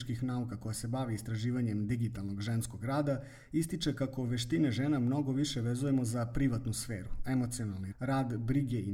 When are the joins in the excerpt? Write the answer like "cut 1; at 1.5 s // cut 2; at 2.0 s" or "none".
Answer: cut 1; at 7.9 s